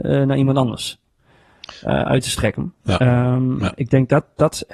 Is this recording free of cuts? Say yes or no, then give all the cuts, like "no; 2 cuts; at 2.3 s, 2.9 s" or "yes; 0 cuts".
yes; 0 cuts